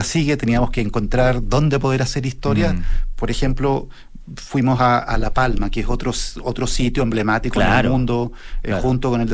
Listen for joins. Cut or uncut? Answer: uncut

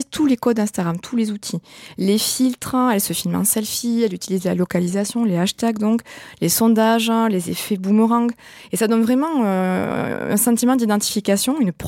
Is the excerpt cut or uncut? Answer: uncut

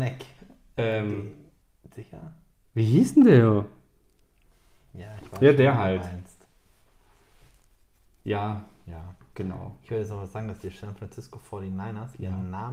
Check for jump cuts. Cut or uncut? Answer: uncut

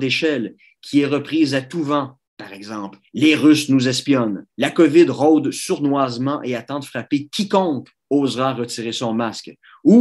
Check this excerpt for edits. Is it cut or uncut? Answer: cut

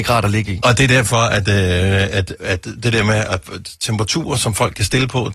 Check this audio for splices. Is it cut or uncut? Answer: cut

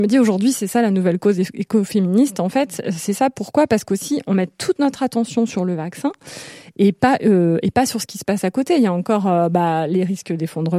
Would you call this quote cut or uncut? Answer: uncut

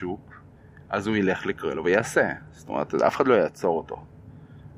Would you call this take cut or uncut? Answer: uncut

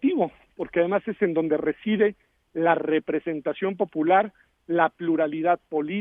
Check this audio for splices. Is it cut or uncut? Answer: uncut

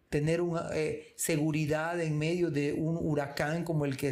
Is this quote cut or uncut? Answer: uncut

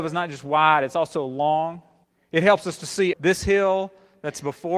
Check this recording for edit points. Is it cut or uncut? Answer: cut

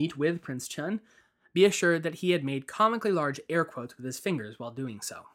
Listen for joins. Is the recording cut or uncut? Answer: uncut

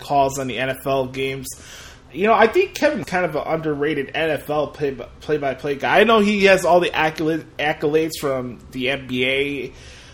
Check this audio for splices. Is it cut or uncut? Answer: cut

